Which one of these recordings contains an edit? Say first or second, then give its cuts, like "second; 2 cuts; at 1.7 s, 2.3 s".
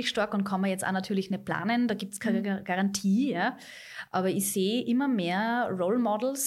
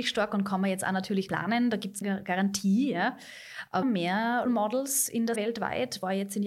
second; 5 cuts; at 1.3 s, 2.0 s, 3.8 s, 4.5 s, 5.4 s